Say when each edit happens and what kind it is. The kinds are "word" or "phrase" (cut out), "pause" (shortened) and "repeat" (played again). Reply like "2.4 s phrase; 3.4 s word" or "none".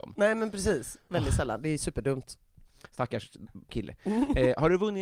3.7 s phrase